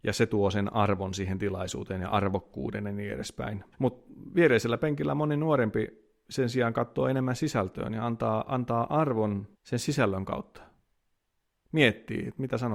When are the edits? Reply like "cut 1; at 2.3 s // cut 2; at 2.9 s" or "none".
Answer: cut 1; at 3.7 s // cut 2; at 9.5 s